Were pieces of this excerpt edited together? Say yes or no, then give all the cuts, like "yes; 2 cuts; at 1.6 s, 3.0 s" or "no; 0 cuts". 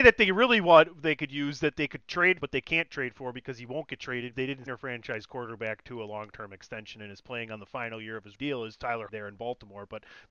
yes; 5 cuts; at 2.4 s, 4.3 s, 4.7 s, 8.3 s, 9.1 s